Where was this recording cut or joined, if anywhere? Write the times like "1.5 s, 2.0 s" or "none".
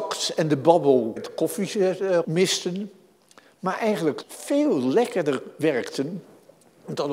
1.2 s, 2.2 s, 4.2 s

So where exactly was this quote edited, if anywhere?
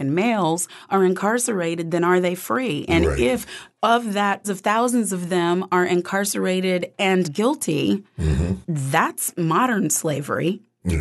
4.4 s, 7.2 s

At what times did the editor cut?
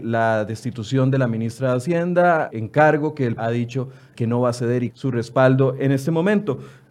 2.5 s, 3.4 s, 4.1 s, 4.9 s

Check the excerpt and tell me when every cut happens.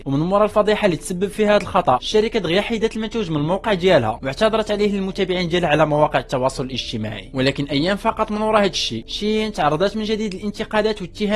none

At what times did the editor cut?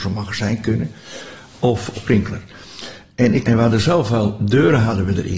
1.9 s, 3.4 s

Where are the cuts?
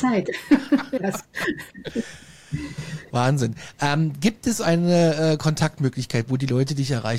1.0 s

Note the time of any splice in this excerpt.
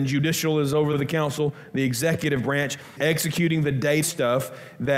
0.9 s, 3.0 s, 4.0 s

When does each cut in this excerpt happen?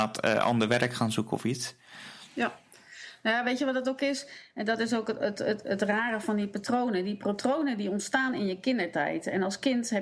none

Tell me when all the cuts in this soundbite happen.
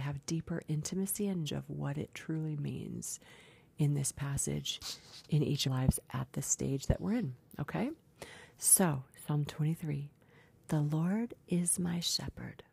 1.5 s, 5.7 s

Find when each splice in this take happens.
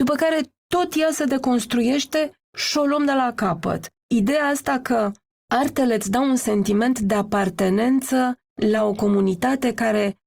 none

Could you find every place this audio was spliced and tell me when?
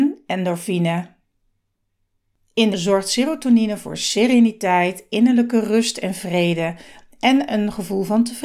2.7 s

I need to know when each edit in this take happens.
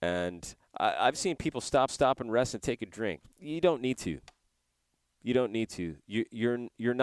1.9 s, 3.3 s

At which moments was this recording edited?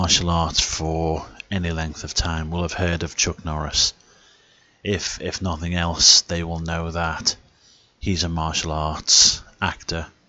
none

